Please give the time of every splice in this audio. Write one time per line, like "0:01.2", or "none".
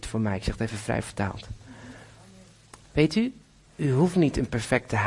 none